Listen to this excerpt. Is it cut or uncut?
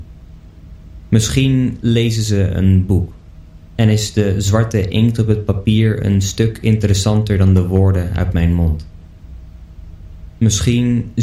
uncut